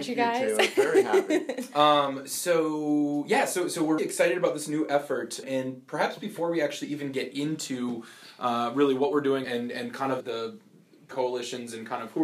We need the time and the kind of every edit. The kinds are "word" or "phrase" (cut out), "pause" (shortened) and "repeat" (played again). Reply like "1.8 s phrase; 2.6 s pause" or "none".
4.0 s word; 5.4 s word; 9.4 s word; 10.2 s word; 11.1 s phrase

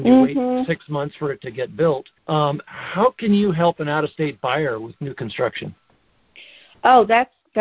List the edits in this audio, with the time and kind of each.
2.2 s pause

